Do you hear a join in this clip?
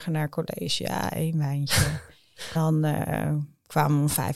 yes; 1 cut; at 2.6 s

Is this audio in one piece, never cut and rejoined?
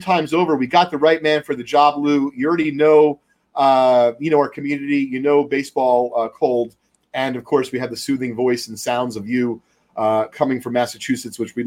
yes; 0 cuts

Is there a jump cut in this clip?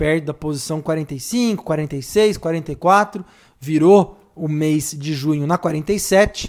no; 0 cuts

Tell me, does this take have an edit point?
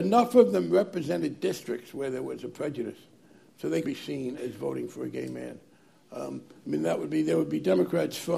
yes; 2 cuts; at 3.8 s, 4.4 s

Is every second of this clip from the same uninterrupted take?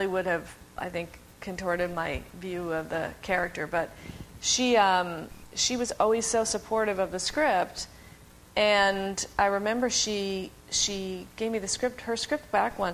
yes; 0 cuts

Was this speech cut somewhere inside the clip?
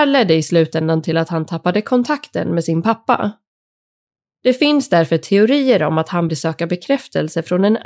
yes; 1 cut; at 6.3 s

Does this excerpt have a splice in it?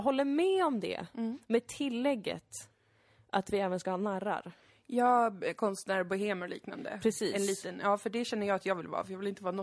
no; 0 cuts

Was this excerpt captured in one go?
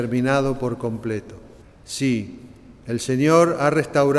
no; 1 cut; at 1.6 s

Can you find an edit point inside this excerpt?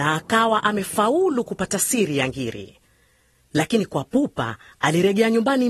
no; 0 cuts

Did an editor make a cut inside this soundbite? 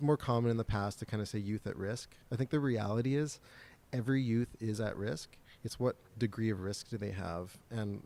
no; 0 cuts

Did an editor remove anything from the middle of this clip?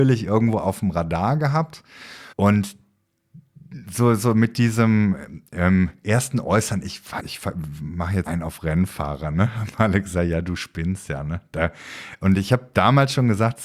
yes; 3 cuts; at 2.3 s, 7.2 s, 8.3 s

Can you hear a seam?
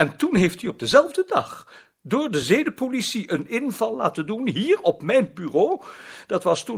no; 0 cuts

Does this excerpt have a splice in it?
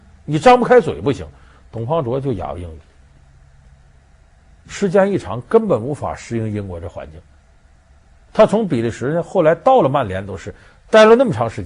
no; 0 cuts

